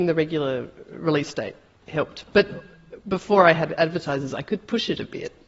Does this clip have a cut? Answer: no; 0 cuts

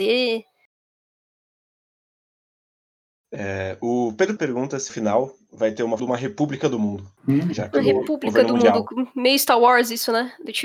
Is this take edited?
yes; 4 cuts; at 4.4 s, 4.9 s, 6.0 s, 7.2 s

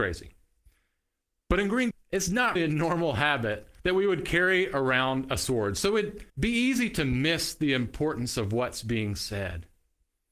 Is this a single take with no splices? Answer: no; 4 cuts; at 1.9 s, 2.6 s, 3.8 s, 6.3 s

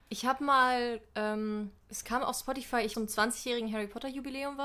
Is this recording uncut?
no; 2 cuts; at 1.8 s, 2.9 s

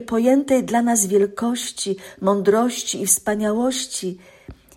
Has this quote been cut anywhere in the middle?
no; 0 cuts

